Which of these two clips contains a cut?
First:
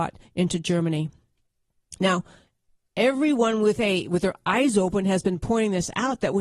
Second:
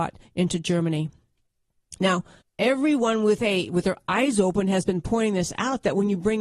second; 1 cut; at 2.4 s

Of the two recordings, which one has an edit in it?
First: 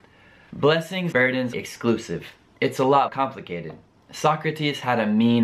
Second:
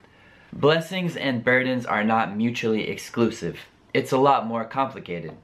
first; 3 cuts; at 1.1 s, 1.5 s, 3.1 s

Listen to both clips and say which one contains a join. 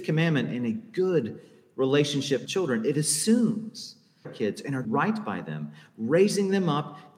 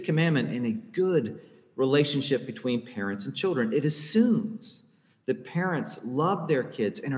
first; 3 cuts; at 2.5 s, 4.2 s, 4.8 s

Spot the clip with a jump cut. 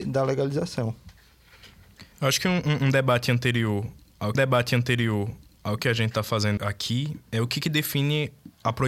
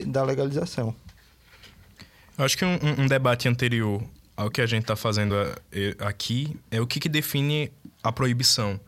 first; 3 cuts; at 2.1 s, 4.3 s, 6.6 s

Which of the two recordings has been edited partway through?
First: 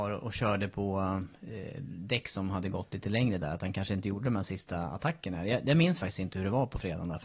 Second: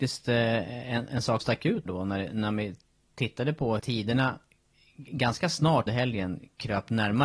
second; 4 cuts; at 1.4 s, 1.9 s, 3.8 s, 5.9 s

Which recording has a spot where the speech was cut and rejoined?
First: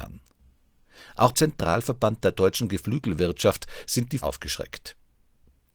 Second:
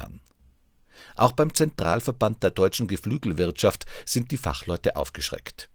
first; 2 cuts; at 1.3 s, 4.2 s

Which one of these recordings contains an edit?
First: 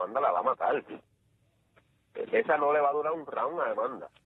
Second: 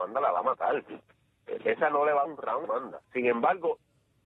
second; 4 cuts; at 1.1 s, 2.2 s, 2.6 s, 3.0 s

